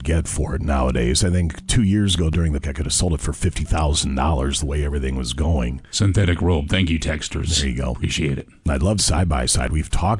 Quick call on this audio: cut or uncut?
cut